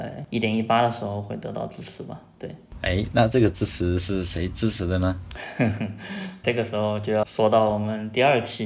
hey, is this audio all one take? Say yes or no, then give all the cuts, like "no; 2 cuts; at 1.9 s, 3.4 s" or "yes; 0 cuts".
no; 2 cuts; at 6.4 s, 7.2 s